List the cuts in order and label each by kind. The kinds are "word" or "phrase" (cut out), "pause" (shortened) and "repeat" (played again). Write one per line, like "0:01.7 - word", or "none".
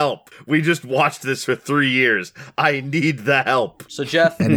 none